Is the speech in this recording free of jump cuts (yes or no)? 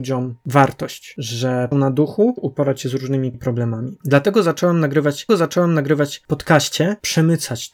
no